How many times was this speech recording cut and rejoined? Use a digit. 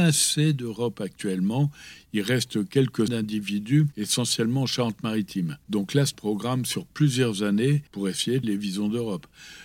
4